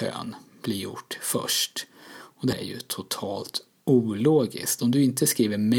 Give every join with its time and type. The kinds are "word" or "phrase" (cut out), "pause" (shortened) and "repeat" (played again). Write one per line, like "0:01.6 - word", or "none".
0:02.5 - word